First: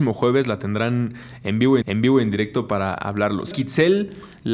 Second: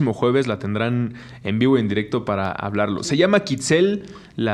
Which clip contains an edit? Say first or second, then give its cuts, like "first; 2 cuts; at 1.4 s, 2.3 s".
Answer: first; 2 cuts; at 1.8 s, 3.5 s